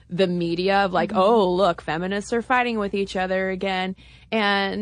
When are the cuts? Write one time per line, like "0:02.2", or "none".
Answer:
none

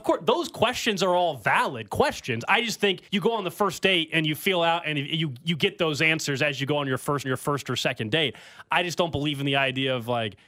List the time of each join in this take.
0:03.1
0:07.2

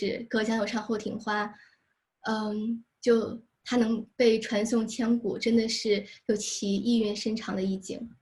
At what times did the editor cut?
none

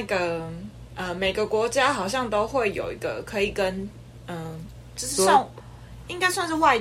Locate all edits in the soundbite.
none

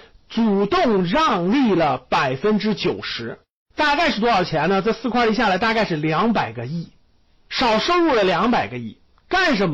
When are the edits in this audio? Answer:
none

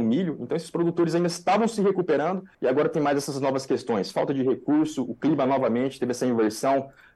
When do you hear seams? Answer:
0:02.5

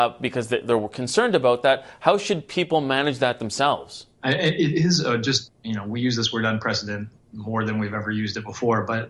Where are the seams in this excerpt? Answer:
0:04.1

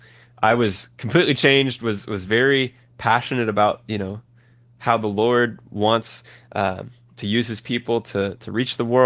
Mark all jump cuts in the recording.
none

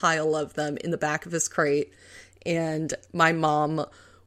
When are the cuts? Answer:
none

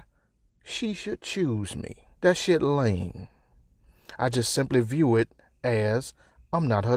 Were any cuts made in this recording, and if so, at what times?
0:02.1

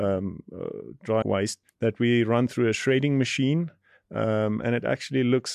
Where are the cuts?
0:01.2
0:01.7

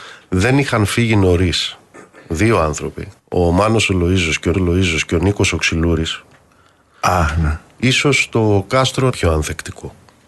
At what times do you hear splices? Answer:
0:03.2
0:04.5
0:09.1

